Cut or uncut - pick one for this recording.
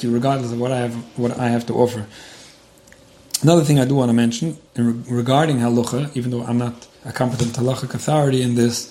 cut